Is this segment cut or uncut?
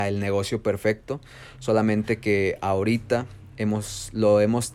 uncut